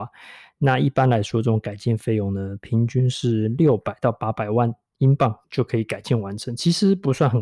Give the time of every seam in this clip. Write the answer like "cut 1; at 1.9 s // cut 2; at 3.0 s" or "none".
cut 1; at 5.4 s